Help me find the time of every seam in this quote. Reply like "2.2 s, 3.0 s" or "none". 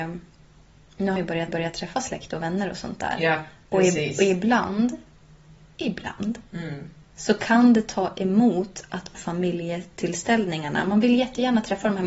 1.2 s, 1.5 s, 6.5 s, 9.1 s